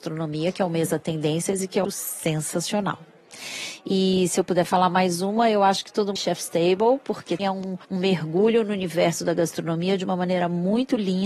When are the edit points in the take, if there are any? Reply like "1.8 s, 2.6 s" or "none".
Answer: 1.8 s, 6.2 s, 7.4 s, 7.8 s